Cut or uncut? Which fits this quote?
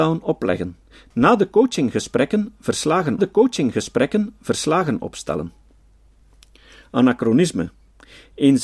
cut